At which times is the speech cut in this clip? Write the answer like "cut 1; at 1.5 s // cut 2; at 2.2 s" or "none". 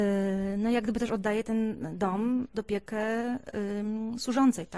cut 1; at 2.5 s